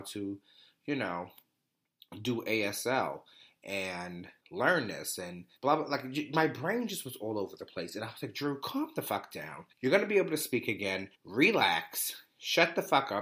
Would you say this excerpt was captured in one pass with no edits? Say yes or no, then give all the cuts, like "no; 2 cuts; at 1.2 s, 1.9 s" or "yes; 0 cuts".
no; 4 cuts; at 4.4 s, 5.6 s, 9.7 s, 11.1 s